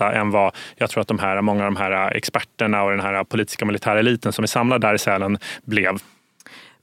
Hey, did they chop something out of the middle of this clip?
no; 0 cuts

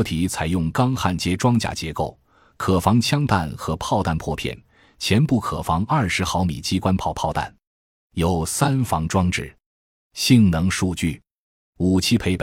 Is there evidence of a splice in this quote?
no; 0 cuts

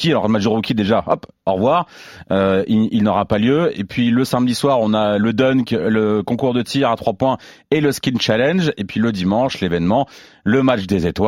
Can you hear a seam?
no; 0 cuts

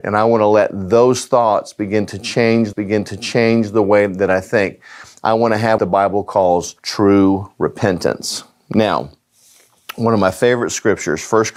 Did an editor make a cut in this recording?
yes; 3 cuts; at 2.7 s, 5.8 s, 6.8 s

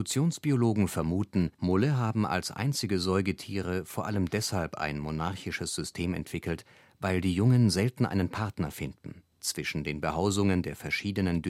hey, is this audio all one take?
no; 2 cuts; at 1.5 s, 9.3 s

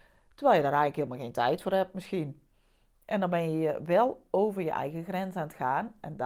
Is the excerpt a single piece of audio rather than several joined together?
yes; 0 cuts

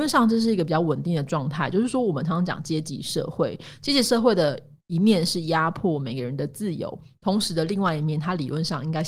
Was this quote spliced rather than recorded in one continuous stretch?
no; 0 cuts

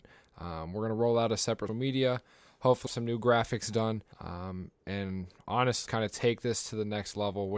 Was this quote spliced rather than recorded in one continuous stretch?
yes; 4 cuts; at 1.7 s, 2.9 s, 4.1 s, 5.9 s

